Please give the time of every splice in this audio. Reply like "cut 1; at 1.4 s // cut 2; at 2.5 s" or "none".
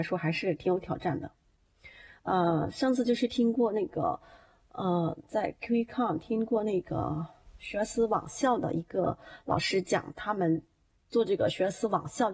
none